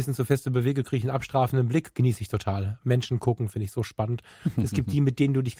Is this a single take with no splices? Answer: yes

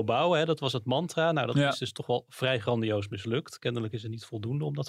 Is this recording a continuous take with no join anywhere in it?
yes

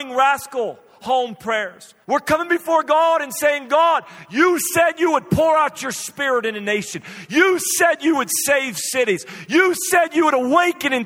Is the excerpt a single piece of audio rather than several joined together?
no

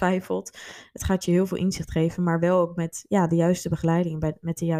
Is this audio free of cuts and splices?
yes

